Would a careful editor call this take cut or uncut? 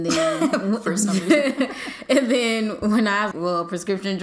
cut